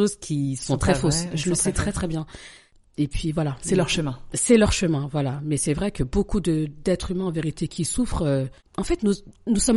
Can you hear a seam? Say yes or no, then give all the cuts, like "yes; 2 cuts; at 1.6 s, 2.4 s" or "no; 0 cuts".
no; 0 cuts